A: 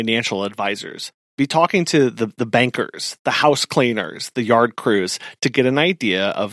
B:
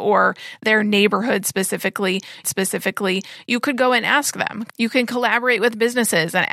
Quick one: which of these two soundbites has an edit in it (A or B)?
B